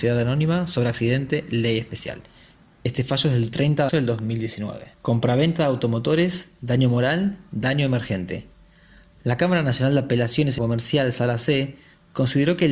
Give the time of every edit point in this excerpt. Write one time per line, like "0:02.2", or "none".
0:03.9
0:04.9
0:10.6